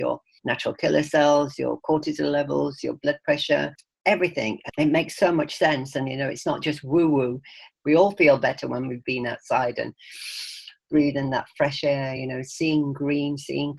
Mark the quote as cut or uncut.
uncut